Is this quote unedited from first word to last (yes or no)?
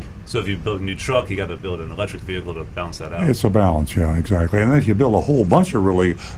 yes